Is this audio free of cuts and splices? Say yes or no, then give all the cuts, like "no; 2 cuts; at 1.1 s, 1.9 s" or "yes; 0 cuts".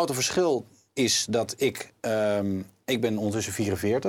yes; 0 cuts